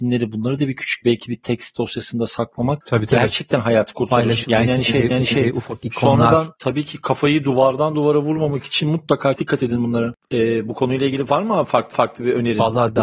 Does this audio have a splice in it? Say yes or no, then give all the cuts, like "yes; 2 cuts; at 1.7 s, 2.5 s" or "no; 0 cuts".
yes; 3 cuts; at 5.1 s, 9.4 s, 11.9 s